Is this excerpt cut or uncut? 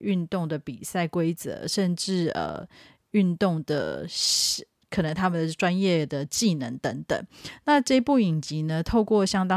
cut